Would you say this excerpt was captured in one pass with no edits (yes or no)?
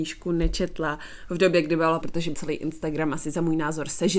no